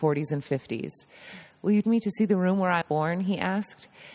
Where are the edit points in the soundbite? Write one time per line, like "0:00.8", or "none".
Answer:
0:01.8
0:02.8

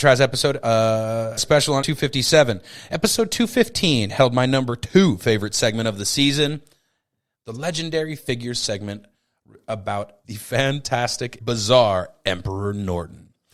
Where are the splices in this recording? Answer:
0:01.4
0:01.8
0:10.2
0:11.4

